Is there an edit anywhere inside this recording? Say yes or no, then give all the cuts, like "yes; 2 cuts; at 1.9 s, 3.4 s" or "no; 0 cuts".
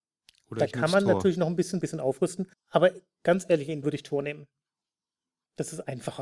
yes; 3 cuts; at 1.8 s, 2.5 s, 3.8 s